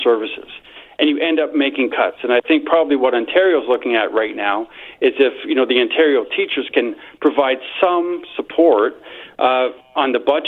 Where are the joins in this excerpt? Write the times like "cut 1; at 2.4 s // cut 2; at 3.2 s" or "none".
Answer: none